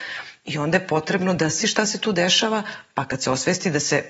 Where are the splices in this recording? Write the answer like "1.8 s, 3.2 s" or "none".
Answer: 1.6 s